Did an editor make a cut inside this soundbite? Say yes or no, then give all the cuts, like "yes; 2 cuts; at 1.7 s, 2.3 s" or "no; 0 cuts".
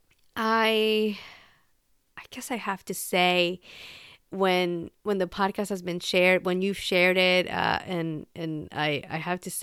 no; 0 cuts